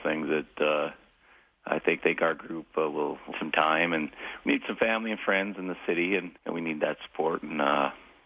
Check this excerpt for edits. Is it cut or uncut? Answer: cut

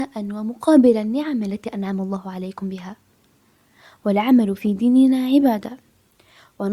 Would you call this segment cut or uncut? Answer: uncut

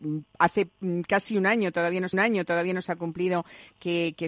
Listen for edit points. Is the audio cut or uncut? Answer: cut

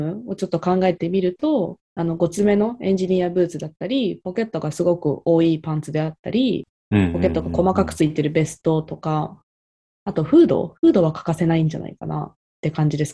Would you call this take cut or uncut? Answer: uncut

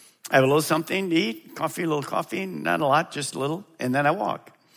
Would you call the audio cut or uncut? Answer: uncut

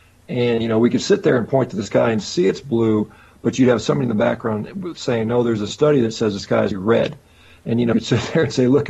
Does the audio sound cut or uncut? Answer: cut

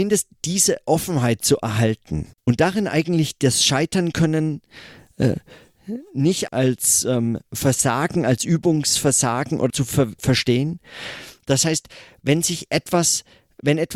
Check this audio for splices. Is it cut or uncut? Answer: cut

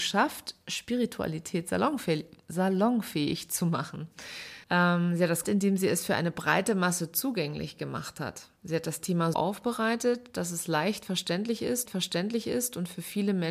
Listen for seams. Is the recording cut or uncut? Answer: cut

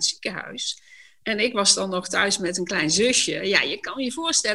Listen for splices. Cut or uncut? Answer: uncut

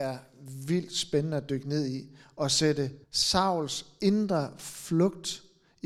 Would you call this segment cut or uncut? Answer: cut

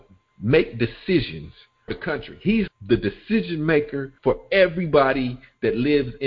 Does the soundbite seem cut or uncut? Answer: cut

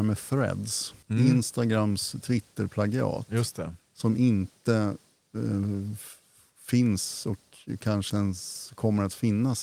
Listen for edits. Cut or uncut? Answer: cut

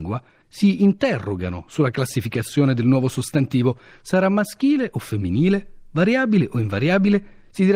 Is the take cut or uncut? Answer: uncut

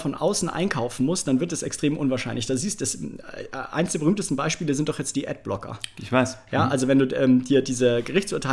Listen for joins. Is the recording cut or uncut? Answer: uncut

